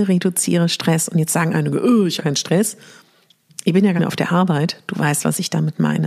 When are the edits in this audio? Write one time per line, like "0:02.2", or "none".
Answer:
0:02.2
0:04.0